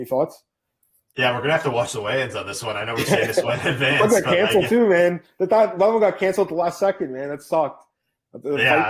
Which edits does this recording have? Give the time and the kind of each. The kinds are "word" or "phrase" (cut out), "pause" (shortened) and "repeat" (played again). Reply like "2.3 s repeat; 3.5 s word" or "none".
none